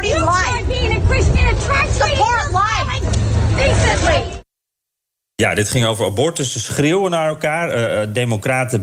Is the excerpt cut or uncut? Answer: uncut